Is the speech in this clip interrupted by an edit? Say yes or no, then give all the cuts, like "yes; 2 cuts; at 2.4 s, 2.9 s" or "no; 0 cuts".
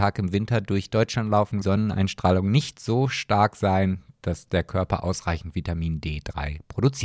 yes; 1 cut; at 1.6 s